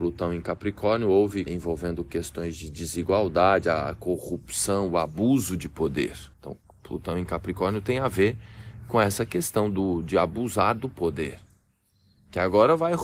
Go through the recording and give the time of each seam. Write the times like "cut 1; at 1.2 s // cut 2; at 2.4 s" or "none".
cut 1; at 1.5 s // cut 2; at 6.3 s